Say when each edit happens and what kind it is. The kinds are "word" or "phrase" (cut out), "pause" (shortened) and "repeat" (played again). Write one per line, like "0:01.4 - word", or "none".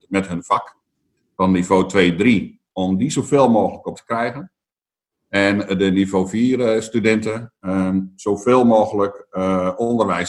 0:03.9 - word